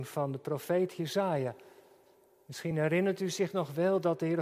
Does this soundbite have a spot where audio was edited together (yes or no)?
no